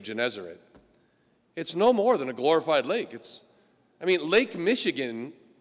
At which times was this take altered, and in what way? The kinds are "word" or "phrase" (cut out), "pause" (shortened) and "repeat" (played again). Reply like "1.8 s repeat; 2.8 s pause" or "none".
none